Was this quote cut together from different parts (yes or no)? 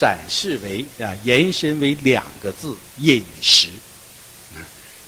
yes